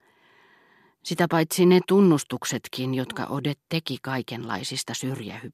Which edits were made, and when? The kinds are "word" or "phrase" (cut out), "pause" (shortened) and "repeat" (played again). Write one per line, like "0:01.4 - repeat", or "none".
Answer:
none